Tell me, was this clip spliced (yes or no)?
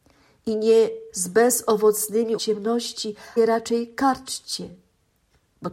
yes